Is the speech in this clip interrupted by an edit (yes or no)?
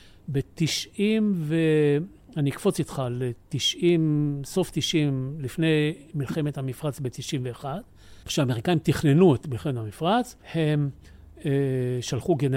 yes